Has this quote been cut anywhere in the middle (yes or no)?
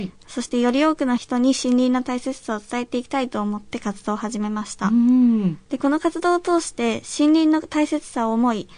yes